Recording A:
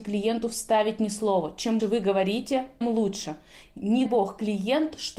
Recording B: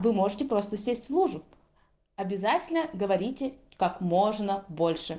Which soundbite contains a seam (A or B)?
A